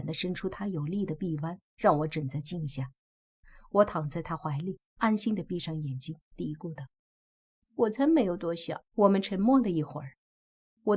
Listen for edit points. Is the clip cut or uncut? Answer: cut